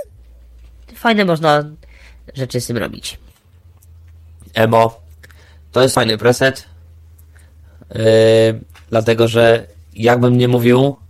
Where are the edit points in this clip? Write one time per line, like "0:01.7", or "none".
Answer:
0:05.9